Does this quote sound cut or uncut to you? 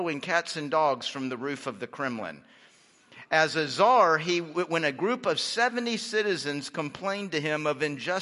uncut